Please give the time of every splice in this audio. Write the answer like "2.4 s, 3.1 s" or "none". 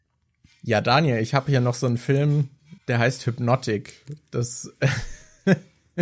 2.8 s